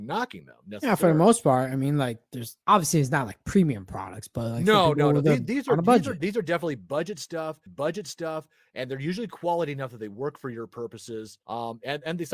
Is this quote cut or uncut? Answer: cut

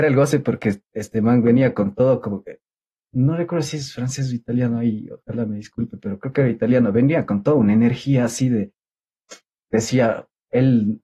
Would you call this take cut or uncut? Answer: uncut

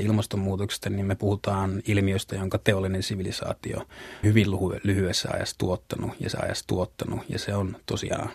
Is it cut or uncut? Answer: cut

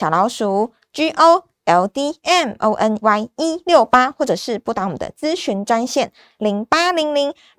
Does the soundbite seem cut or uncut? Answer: cut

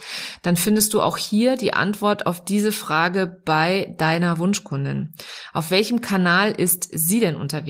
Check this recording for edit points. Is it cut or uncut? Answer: uncut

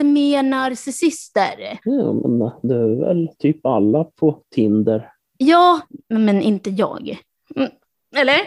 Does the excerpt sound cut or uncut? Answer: cut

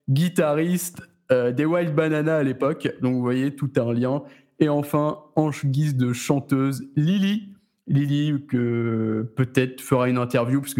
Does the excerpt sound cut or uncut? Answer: uncut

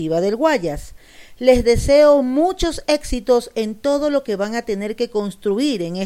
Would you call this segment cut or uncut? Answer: uncut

